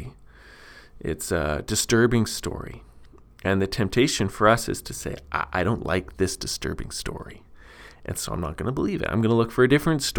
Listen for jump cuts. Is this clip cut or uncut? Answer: uncut